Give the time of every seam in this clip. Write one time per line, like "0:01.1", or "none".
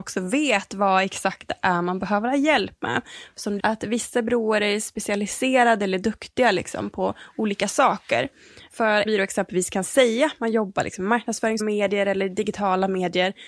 0:03.6
0:09.1
0:11.6